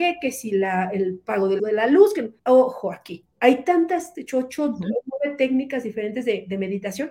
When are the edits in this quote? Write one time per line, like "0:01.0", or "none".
0:01.6
0:02.4
0:03.3
0:04.1